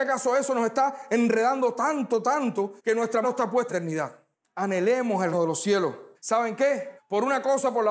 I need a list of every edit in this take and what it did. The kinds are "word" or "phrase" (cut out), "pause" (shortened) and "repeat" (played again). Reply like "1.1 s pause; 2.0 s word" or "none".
1.8 s word; 2.8 s pause; 3.2 s word; 3.7 s phrase; 5.3 s word; 6.1 s pause; 7.0 s pause